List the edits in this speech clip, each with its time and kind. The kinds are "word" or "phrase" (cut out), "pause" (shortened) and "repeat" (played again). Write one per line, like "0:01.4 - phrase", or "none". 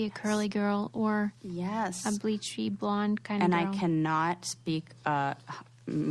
0:01.4 - pause